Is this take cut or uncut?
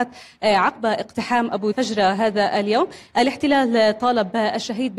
cut